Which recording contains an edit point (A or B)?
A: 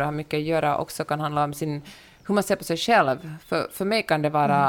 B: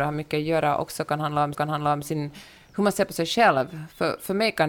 B